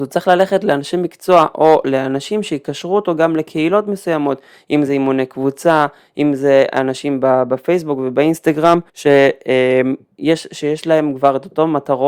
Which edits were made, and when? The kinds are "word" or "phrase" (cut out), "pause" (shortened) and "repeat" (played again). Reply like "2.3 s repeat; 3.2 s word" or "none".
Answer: 8.9 s pause